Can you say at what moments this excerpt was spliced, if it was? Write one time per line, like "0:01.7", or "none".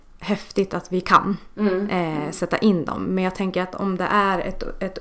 none